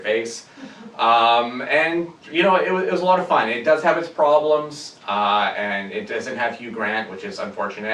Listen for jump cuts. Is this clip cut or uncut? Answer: uncut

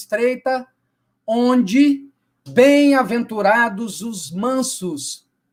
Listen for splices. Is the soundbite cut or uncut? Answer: uncut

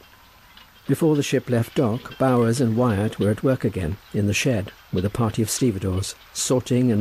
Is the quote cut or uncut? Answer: uncut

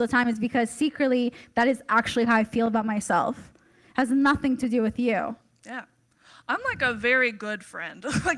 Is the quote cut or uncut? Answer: uncut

